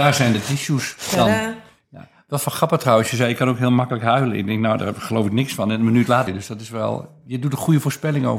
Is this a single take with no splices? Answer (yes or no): no